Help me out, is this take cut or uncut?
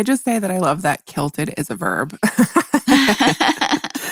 uncut